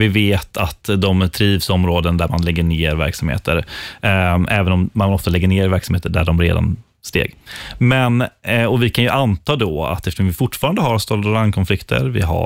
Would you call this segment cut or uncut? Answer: uncut